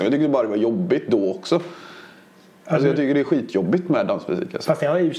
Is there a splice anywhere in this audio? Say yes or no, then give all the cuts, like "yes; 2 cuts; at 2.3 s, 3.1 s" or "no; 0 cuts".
no; 0 cuts